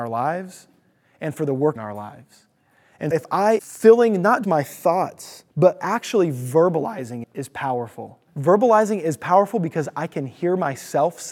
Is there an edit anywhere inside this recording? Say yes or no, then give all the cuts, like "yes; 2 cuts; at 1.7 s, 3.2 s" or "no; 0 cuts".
yes; 7 cuts; at 1.8 s, 3.1 s, 3.6 s, 4.4 s, 5.5 s, 7.2 s, 8.3 s